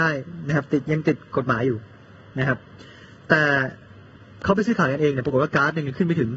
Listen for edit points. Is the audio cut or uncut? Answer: uncut